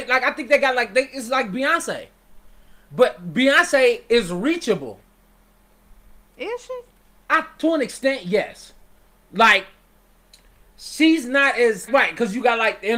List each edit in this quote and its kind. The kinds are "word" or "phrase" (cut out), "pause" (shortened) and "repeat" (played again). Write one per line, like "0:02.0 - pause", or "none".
0:11.9 - word